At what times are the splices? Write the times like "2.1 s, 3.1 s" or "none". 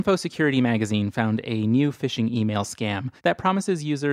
3.2 s